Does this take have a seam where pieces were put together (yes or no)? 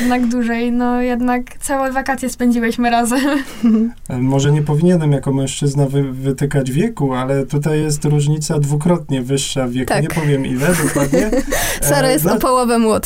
no